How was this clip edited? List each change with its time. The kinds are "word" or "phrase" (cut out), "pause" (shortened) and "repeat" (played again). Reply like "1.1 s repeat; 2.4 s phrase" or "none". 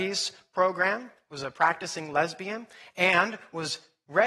none